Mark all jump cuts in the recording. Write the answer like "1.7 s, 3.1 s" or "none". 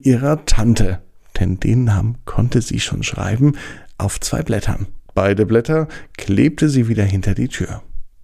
none

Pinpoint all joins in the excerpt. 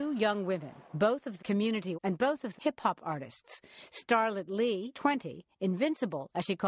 1.4 s, 1.9 s, 2.6 s, 4.9 s

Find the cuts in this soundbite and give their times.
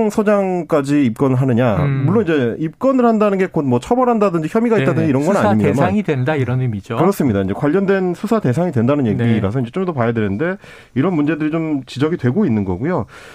none

